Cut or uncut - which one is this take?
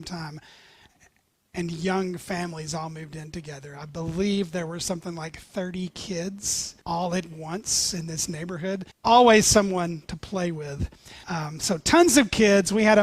cut